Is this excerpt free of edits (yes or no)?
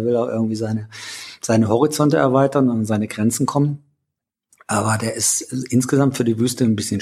yes